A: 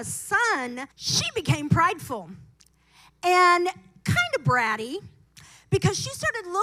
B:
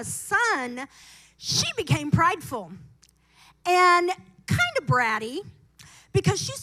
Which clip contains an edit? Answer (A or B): A